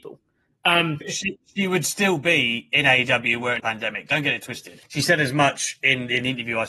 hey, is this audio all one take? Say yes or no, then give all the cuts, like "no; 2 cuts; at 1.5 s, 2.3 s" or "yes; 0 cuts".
no; 3 cuts; at 1.0 s, 3.6 s, 4.9 s